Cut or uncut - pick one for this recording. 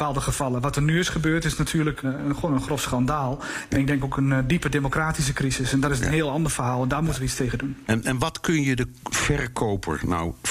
cut